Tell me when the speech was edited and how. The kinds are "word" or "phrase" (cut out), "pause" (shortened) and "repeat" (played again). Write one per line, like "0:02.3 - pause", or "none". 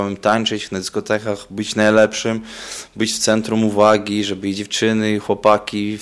none